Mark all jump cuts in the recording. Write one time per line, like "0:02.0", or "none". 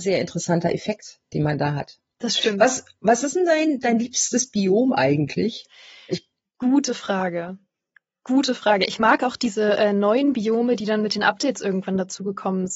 none